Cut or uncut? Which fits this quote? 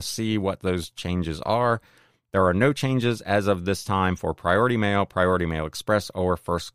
uncut